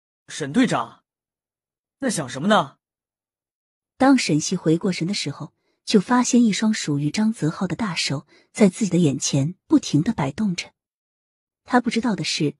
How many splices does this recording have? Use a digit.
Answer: 0